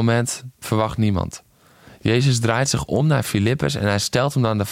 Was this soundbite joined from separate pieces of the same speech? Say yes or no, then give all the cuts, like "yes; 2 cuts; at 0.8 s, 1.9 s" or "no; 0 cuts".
no; 0 cuts